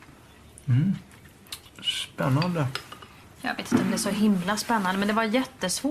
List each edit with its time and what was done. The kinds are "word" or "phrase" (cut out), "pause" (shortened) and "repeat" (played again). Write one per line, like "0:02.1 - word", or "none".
none